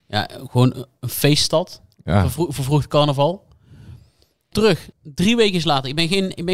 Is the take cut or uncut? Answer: cut